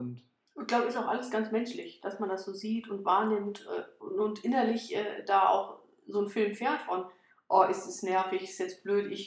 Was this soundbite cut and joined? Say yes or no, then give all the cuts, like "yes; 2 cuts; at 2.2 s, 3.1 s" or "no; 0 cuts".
no; 0 cuts